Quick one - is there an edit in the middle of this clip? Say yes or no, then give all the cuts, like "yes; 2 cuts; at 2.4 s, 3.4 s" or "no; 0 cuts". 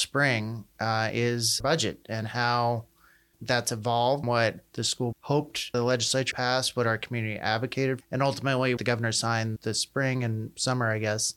yes; 9 cuts; at 1.6 s, 3.3 s, 4.2 s, 5.1 s, 5.7 s, 6.3 s, 8.0 s, 8.8 s, 9.6 s